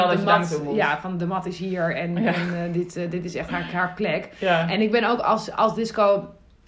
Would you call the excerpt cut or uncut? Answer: uncut